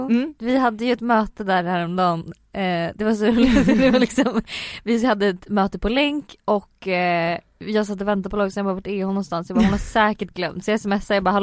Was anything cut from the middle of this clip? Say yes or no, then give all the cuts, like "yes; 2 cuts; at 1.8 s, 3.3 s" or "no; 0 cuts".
no; 0 cuts